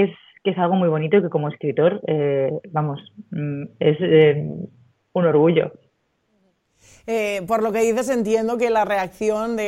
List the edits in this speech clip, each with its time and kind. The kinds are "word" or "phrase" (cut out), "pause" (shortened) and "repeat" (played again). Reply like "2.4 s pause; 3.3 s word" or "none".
none